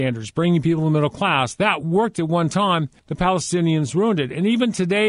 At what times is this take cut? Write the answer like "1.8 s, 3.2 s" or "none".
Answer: 3.0 s

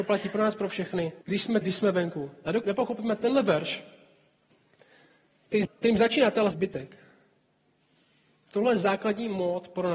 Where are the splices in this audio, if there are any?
1.2 s, 1.6 s, 2.6 s, 5.7 s, 6.5 s

